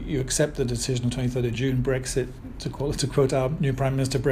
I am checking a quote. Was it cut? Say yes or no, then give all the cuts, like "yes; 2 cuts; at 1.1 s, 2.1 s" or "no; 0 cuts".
no; 0 cuts